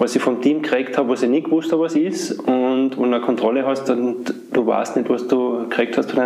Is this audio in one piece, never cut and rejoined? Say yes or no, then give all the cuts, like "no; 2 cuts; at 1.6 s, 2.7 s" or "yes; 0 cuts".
yes; 0 cuts